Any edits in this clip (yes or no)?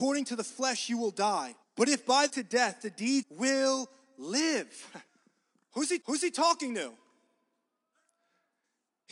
yes